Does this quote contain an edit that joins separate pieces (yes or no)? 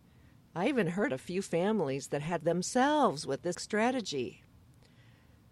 yes